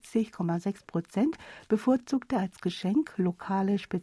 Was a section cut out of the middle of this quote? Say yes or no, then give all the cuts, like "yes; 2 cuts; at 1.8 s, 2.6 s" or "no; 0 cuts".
no; 0 cuts